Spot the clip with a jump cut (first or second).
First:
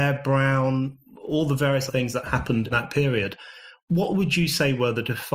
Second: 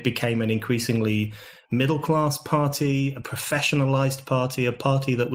first